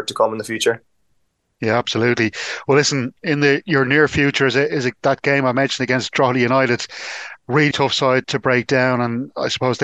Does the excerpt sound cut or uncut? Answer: cut